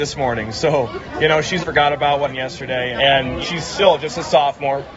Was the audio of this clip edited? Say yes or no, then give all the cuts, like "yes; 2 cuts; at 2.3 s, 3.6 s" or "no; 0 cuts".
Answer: yes; 4 cuts; at 1.6 s, 2.3 s, 2.9 s, 3.4 s